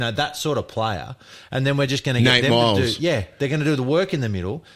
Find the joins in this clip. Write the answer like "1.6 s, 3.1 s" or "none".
none